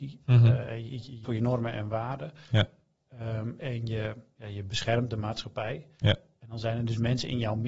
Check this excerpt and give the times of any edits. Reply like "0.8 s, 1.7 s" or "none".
1.2 s, 3.6 s